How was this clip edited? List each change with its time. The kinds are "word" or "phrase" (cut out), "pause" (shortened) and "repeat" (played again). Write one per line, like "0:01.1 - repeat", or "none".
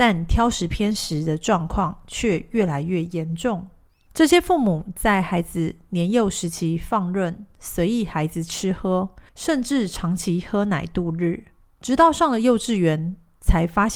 0:03.9 - pause
0:09.3 - pause
0:11.6 - pause